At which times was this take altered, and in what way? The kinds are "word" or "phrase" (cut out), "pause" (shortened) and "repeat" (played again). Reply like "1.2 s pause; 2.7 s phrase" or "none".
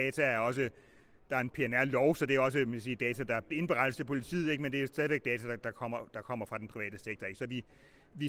3.5 s word

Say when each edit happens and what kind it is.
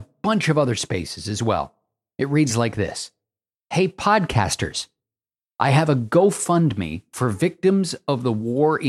none

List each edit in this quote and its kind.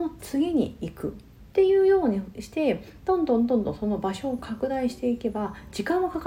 1.5 s pause

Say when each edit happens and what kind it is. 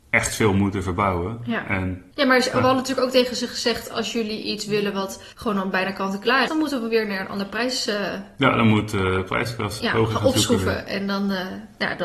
2.1 s pause; 5.3 s pause; 6.5 s word; 9.8 s word

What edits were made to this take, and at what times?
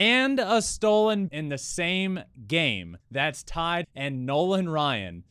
1.3 s word; 3.0 s pause; 3.8 s phrase

